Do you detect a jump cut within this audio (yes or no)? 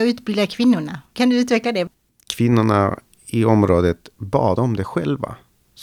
no